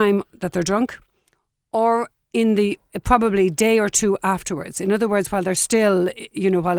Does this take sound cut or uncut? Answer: uncut